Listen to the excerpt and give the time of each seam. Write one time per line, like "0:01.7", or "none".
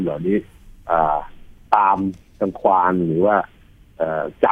none

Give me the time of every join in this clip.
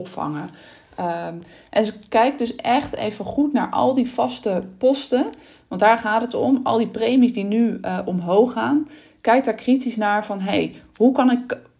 none

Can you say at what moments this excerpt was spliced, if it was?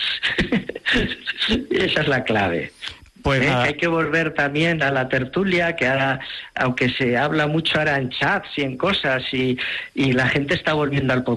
none

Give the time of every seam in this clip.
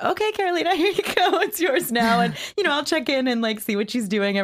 none

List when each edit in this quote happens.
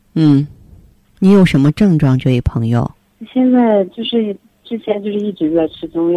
0:01.2

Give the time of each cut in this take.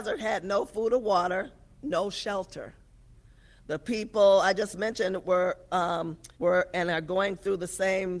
0:06.3

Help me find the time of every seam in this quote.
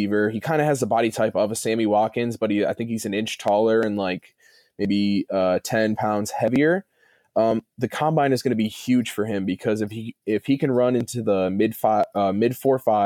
none

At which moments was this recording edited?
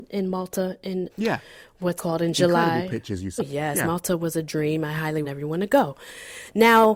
0:01.1
0:02.0
0:03.4
0:05.2

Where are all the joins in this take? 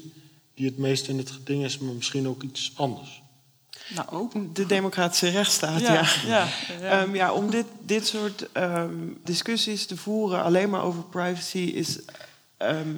0:09.3

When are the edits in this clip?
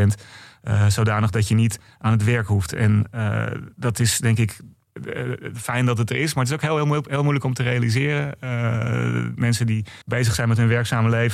0:10.0

